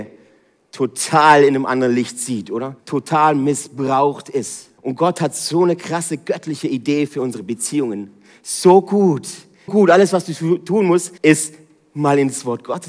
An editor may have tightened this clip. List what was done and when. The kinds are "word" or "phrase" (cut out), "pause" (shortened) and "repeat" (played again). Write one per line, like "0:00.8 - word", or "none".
0:02.8 - pause
0:04.8 - pause
0:09.7 - word
0:11.2 - pause